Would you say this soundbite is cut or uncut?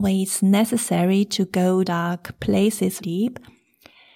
cut